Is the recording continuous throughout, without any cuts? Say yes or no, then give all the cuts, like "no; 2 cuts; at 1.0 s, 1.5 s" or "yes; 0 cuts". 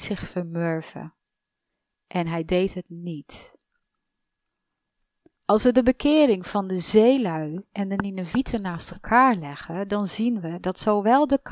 yes; 0 cuts